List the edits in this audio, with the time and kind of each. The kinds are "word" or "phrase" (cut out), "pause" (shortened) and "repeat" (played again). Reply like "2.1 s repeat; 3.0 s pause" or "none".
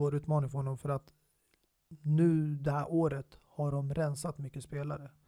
none